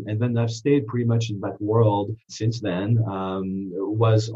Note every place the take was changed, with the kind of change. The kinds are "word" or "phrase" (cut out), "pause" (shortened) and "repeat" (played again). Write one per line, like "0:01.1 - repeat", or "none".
0:02.2 - pause